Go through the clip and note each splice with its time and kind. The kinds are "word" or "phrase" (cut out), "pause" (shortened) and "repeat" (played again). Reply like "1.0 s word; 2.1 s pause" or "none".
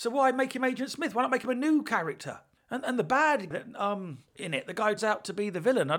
2.6 s pause; 3.5 s word; 4.3 s pause; 5.0 s word